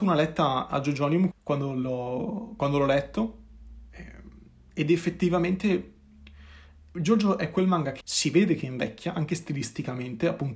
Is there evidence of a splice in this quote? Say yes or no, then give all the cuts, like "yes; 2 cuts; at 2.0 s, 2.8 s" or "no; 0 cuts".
yes; 2 cuts; at 1.3 s, 8.0 s